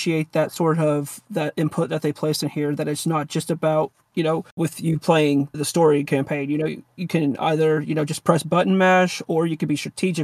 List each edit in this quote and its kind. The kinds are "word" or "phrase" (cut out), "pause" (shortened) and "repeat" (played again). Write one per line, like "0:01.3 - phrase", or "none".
0:04.5 - pause
0:05.5 - word